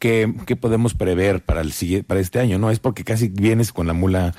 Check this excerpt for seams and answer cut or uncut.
uncut